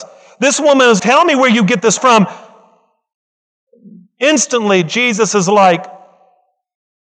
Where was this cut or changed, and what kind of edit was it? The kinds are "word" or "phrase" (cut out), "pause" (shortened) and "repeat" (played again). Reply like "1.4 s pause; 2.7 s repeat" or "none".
1.0 s word; 2.0 s word